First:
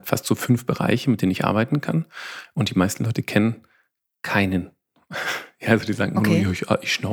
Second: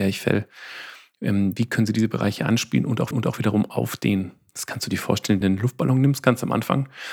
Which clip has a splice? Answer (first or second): second